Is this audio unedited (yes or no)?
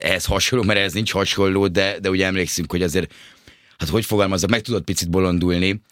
yes